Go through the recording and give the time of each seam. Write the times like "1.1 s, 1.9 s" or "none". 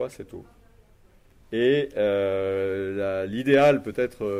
none